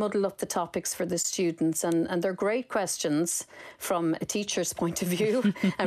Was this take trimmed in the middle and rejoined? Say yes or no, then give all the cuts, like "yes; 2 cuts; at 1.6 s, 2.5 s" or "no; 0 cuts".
no; 0 cuts